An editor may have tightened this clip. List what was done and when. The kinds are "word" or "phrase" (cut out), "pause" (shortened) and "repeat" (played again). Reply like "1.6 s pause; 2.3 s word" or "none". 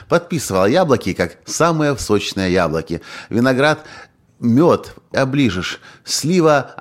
2.0 s word; 5.1 s word